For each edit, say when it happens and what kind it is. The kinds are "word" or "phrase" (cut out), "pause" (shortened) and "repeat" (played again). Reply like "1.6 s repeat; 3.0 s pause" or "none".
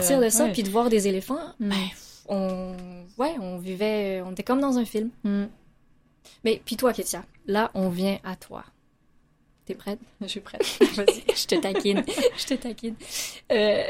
none